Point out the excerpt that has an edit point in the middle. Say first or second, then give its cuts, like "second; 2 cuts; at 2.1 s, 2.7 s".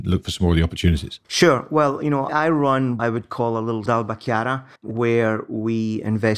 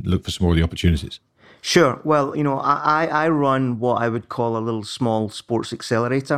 first; 5 cuts; at 1.2 s, 2.3 s, 3.0 s, 3.9 s, 4.8 s